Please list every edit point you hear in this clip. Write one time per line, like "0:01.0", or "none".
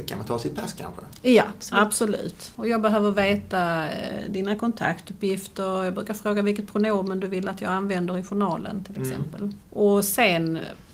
0:09.6